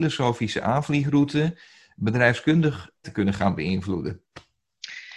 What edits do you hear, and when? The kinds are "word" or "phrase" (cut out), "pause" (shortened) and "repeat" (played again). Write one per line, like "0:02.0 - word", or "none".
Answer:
0:03.0 - word